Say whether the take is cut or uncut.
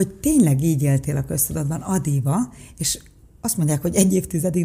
uncut